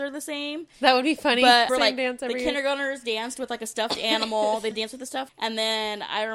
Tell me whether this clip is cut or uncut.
cut